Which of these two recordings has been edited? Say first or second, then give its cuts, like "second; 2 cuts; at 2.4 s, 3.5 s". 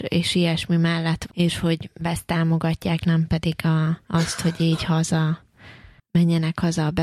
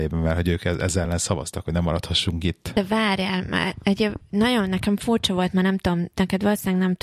first; 4 cuts; at 1.3 s, 2.0 s, 3.0 s, 4.0 s